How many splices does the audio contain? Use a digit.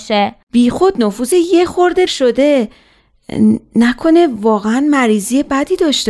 2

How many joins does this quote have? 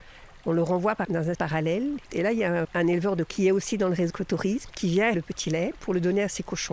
6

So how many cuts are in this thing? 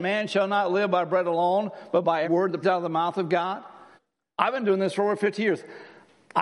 3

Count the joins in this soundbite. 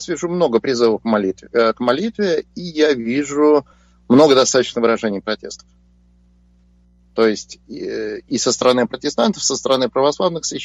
0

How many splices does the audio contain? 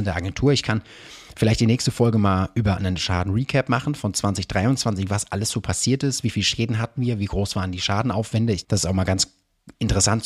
1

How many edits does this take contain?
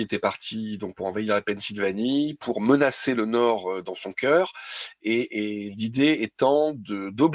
0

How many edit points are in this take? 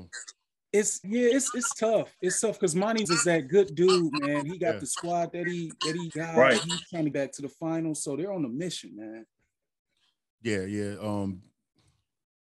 4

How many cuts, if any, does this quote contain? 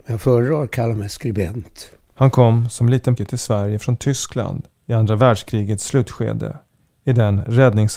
2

